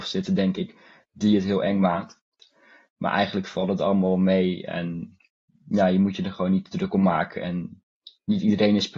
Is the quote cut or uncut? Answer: uncut